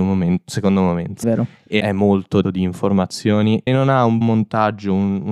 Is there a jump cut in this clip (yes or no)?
yes